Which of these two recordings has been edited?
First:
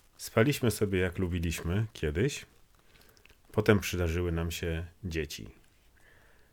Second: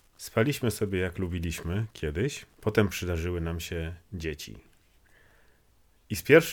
second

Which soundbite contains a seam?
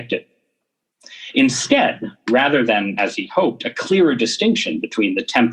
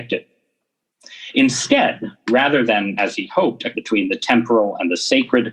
second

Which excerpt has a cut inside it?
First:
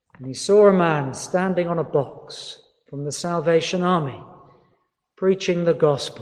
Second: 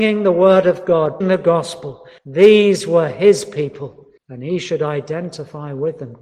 second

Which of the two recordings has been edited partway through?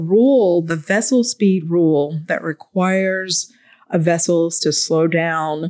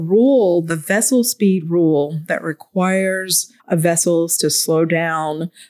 second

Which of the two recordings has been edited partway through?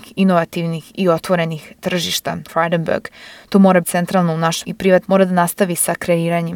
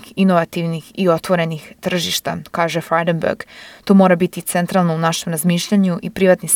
first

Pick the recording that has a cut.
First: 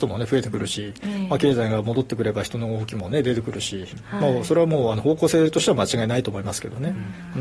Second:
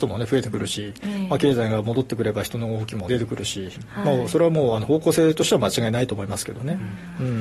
second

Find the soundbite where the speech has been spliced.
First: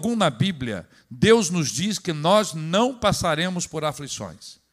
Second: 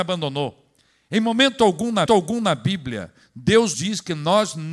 second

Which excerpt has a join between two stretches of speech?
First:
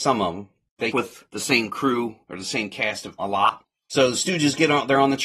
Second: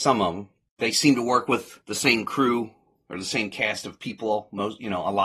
first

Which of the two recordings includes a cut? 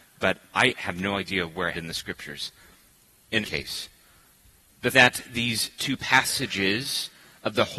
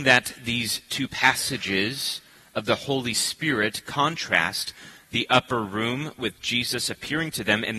first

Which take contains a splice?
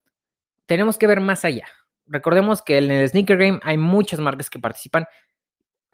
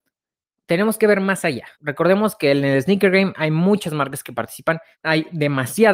second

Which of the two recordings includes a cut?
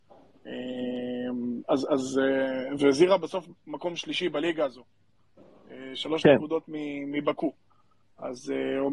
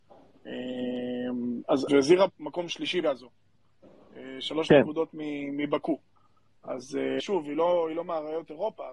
second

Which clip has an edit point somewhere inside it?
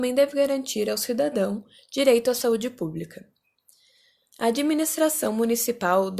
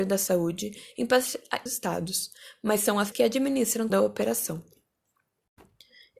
second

